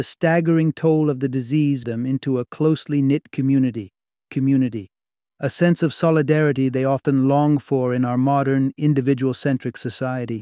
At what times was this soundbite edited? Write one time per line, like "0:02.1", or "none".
0:01.8
0:04.3